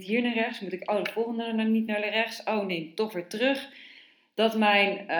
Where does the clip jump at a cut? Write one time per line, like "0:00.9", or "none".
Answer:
none

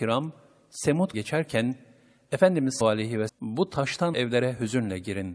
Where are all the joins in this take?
0:01.1
0:02.8
0:03.3
0:04.1

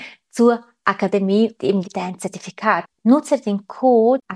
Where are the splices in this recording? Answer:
0:01.5
0:01.8

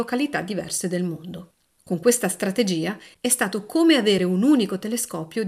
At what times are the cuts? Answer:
none

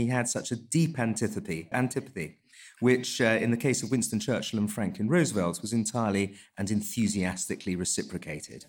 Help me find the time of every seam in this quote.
0:01.7

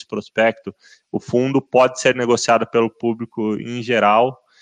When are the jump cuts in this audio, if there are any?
none

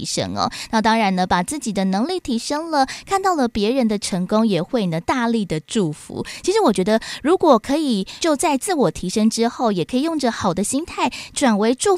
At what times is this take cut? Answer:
0:08.2

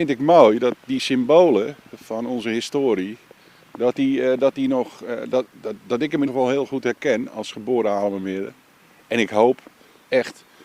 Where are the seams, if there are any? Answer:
0:05.5
0:06.3

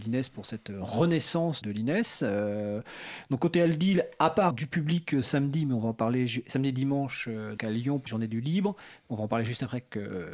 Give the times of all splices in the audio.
0:01.6
0:04.5
0:07.6
0:08.1

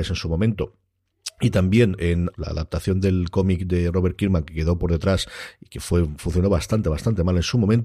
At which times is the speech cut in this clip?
0:02.3

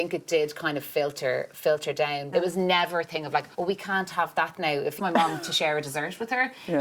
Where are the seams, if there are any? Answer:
0:02.3
0:03.5
0:05.0

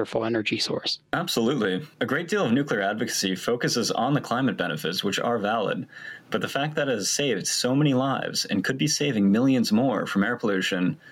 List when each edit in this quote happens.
none

